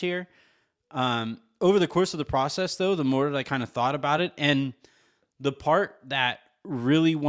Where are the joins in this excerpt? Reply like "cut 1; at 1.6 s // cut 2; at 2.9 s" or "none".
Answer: none